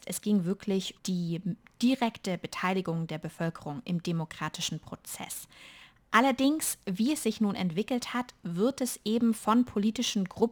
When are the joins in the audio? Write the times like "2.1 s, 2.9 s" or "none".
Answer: 1.0 s